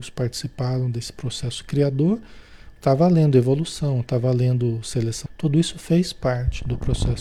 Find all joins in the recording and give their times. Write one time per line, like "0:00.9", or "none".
0:02.8
0:05.3